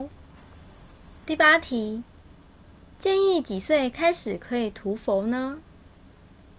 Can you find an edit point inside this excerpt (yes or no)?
no